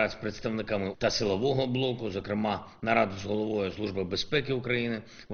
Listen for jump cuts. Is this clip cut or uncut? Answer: cut